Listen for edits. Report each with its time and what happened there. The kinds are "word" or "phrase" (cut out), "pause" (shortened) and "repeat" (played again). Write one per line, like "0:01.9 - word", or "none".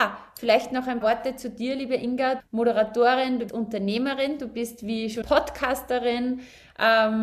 0:01.0 - word
0:02.4 - word
0:03.5 - word
0:05.2 - word